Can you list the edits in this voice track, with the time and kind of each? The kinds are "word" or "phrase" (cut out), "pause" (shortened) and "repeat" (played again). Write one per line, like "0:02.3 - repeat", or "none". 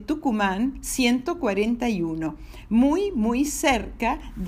none